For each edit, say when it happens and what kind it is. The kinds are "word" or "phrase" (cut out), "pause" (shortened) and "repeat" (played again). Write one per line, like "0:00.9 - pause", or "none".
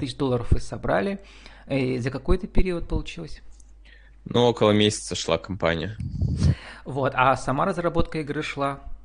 none